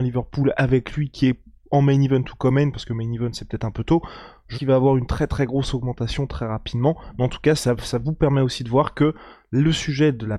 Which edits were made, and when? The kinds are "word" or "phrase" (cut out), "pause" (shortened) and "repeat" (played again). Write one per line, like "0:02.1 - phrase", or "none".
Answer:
0:04.5 - word
0:07.6 - word